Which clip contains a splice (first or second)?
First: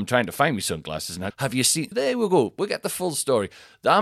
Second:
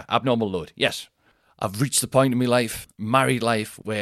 first